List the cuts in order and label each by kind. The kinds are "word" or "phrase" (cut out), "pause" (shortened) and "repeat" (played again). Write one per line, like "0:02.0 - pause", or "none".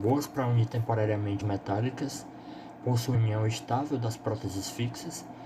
0:01.4 - word
0:03.1 - word